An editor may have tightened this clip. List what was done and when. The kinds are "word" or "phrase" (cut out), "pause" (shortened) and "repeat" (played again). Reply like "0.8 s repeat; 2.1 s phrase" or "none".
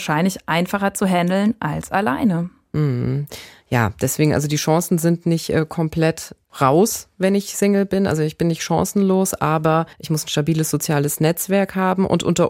6.4 s pause; 9.9 s pause